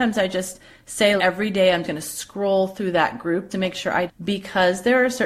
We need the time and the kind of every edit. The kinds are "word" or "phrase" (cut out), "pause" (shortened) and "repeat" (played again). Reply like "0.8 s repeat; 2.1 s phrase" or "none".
1.2 s word; 1.8 s word; 3.5 s word; 4.1 s phrase